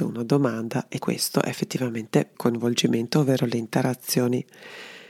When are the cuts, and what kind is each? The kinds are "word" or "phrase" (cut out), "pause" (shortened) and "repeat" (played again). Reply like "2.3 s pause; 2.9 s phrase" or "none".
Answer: 1.0 s word; 2.3 s phrase